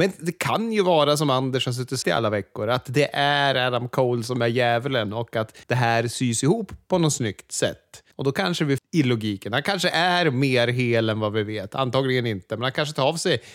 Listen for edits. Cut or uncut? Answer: cut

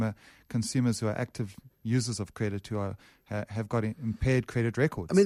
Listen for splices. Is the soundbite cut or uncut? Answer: uncut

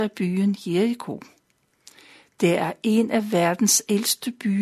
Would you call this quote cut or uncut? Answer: uncut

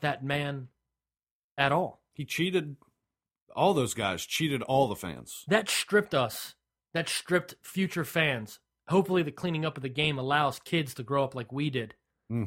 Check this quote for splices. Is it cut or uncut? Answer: uncut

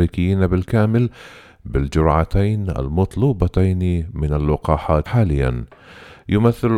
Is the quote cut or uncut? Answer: cut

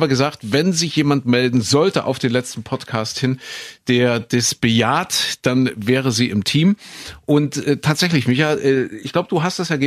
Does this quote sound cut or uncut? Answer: uncut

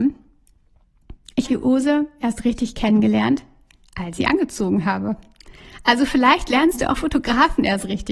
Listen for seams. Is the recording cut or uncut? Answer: cut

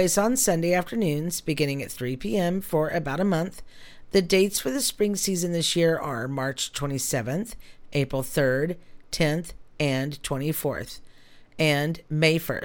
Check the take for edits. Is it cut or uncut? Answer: uncut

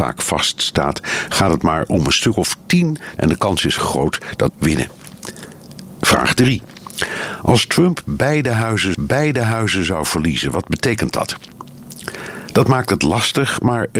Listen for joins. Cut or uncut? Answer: cut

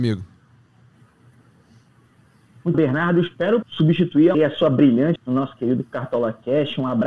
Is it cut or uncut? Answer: cut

